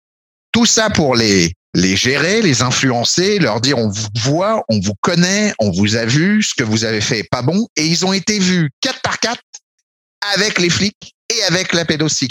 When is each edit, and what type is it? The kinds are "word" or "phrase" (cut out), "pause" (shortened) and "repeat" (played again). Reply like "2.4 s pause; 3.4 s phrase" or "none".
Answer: 1.6 s pause; 11.2 s pause